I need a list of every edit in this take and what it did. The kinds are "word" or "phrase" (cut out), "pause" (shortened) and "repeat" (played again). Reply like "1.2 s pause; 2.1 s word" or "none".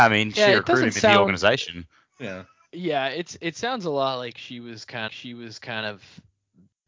5.1 s repeat